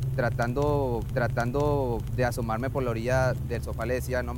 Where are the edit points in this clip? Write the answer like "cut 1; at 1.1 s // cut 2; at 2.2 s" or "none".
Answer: cut 1; at 1.1 s